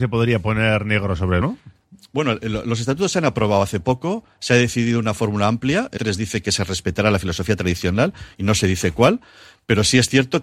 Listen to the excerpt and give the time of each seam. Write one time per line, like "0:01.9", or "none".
0:01.4
0:06.0